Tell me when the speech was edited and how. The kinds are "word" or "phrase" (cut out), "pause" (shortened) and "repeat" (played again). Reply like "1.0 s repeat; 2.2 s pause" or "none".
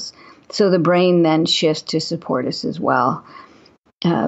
none